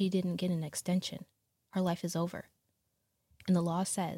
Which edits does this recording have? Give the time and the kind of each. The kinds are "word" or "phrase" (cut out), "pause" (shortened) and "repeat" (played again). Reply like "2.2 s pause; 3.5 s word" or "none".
none